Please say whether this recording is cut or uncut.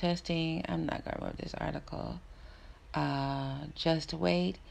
cut